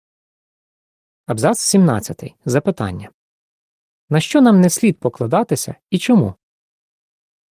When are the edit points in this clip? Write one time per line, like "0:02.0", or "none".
none

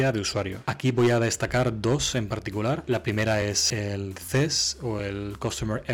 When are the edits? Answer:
none

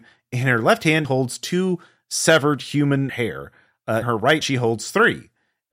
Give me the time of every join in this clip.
0:01.0
0:03.1
0:04.0
0:04.4

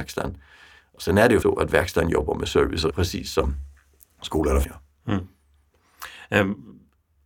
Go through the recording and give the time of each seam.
0:01.4
0:02.9
0:04.6

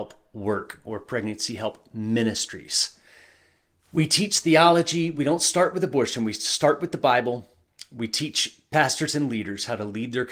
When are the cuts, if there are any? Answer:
none

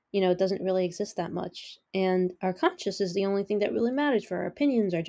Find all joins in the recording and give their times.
none

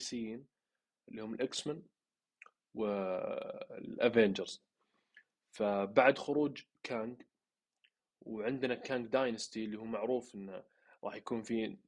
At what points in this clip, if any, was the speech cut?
none

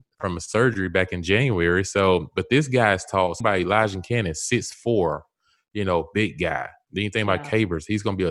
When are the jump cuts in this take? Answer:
0:03.4

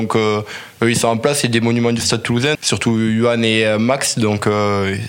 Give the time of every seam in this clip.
0:02.5

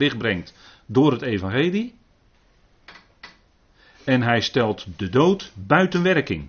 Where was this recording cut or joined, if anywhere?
none

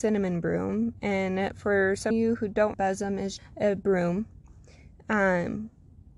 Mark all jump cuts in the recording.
0:02.1
0:02.7
0:03.4

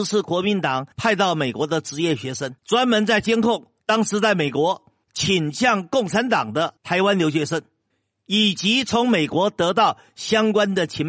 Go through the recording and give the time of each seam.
0:00.9
0:02.6
0:03.8
0:05.0
0:06.8
0:07.9

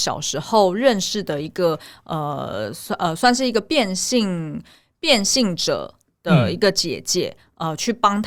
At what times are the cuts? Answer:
none

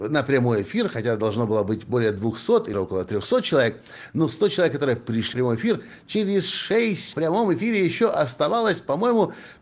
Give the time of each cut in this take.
0:02.7
0:05.3
0:07.1

